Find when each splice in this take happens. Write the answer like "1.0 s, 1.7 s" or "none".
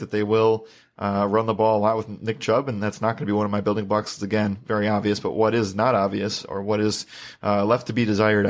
none

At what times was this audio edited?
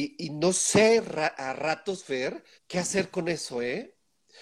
2.6 s

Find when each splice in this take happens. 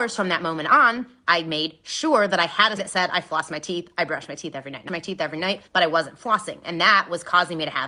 2.8 s, 4.9 s, 5.7 s

